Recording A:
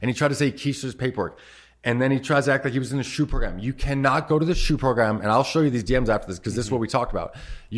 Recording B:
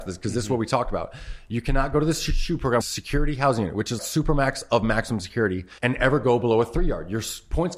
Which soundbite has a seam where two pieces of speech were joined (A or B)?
B